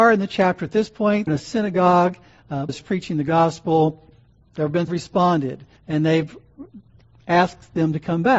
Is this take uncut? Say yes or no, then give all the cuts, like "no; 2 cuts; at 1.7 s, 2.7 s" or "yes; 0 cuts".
no; 5 cuts; at 1.3 s, 2.7 s, 4.4 s, 4.9 s, 5.8 s